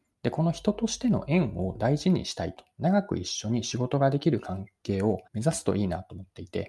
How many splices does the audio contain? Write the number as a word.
two